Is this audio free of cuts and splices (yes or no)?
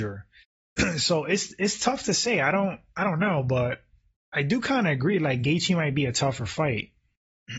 yes